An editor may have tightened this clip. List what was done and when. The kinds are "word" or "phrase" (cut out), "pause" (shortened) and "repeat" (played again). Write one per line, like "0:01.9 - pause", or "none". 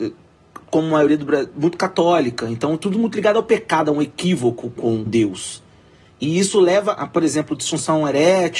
0:04.8 - word
0:05.1 - word
0:07.0 - word